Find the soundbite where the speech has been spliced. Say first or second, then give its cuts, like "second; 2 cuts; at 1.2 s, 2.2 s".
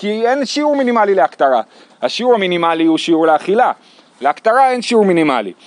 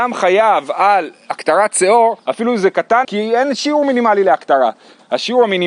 second; 2 cuts; at 2.2 s, 3.0 s